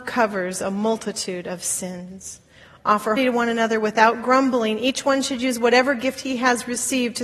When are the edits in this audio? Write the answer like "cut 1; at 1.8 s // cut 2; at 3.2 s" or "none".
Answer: cut 1; at 3.2 s